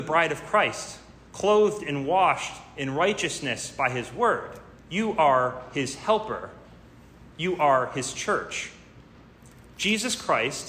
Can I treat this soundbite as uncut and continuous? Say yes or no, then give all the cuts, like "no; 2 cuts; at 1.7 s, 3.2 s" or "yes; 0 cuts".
no; 2 cuts; at 4.8 s, 7.3 s